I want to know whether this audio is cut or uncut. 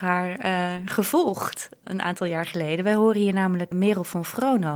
cut